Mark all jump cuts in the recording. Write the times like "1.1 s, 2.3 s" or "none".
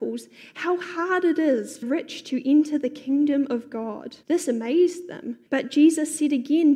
1.8 s, 4.2 s, 5.5 s